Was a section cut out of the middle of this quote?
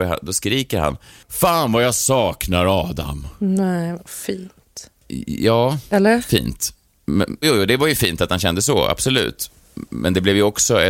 yes; 1 cut; at 7.4 s

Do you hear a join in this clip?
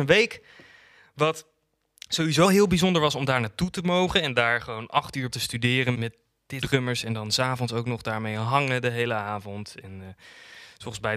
yes; 4 cuts; at 2.4 s, 5.3 s, 5.9 s, 6.6 s

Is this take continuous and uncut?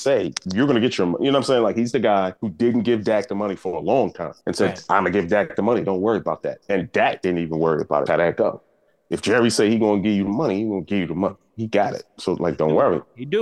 no; 3 cuts; at 2.4 s, 4.4 s, 8.1 s

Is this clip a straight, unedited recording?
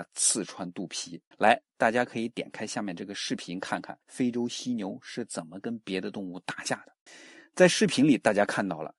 no; 3 cuts; at 1.3 s, 4.0 s, 7.1 s

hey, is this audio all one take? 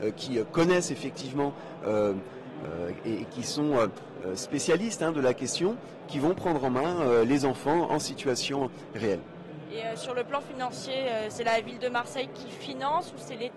yes; 0 cuts

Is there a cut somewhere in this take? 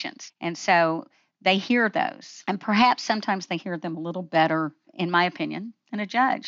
no; 0 cuts

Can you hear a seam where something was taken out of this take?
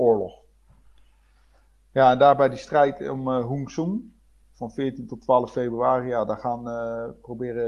no; 0 cuts

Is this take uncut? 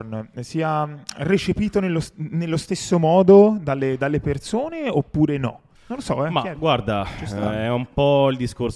no; 1 cut; at 5.8 s

